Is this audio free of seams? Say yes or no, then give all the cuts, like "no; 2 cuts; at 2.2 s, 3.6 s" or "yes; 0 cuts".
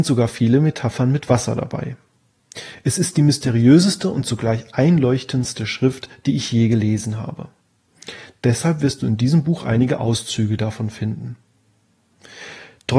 yes; 0 cuts